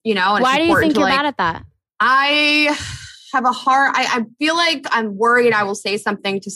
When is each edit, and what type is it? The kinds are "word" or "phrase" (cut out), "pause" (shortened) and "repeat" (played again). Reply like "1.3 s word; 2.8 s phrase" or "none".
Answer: none